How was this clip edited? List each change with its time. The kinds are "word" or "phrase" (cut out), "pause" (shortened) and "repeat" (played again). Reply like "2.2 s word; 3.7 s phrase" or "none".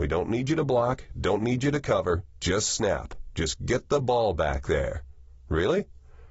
none